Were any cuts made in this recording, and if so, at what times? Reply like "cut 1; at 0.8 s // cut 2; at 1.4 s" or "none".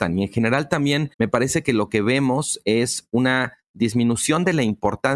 cut 1; at 1.1 s